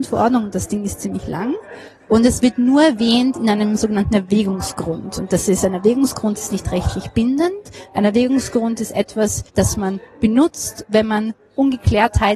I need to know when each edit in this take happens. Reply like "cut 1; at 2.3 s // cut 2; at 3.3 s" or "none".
cut 1; at 9.5 s